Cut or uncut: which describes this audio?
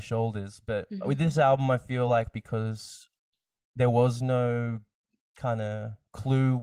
uncut